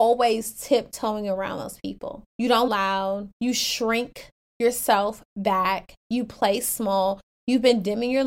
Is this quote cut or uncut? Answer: cut